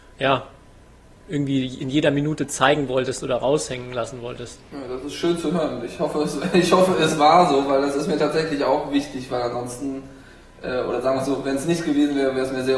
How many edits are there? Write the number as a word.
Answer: one